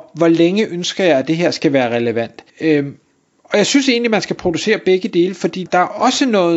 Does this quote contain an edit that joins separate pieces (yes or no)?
yes